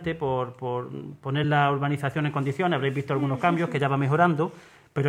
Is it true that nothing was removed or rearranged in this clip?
yes; 0 cuts

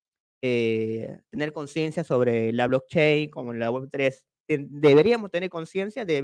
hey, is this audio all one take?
yes; 0 cuts

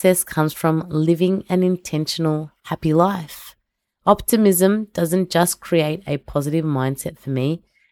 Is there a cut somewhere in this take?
no; 0 cuts

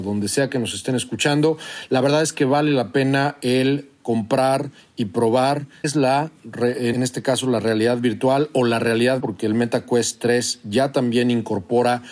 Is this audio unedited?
no; 3 cuts; at 5.8 s, 6.9 s, 9.2 s

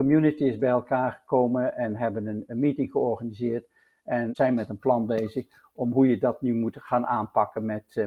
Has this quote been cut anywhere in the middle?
no; 0 cuts

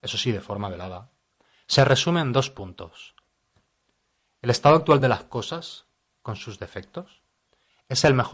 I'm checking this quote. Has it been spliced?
no; 0 cuts

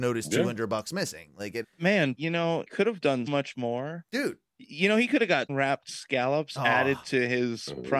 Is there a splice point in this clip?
yes; 6 cuts; at 1.6 s, 2.1 s, 2.7 s, 3.3 s, 4.1 s, 5.5 s

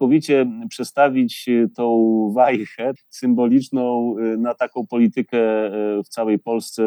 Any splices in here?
yes; 1 cut; at 3.0 s

